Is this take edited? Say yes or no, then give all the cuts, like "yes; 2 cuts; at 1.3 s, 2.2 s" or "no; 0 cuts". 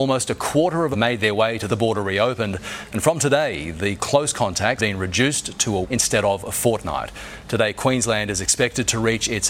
yes; 5 cuts; at 0.9 s, 1.7 s, 4.0 s, 4.8 s, 5.8 s